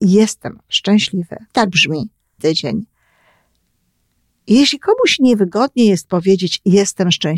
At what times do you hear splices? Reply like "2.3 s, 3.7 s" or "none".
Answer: 1.5 s, 2.4 s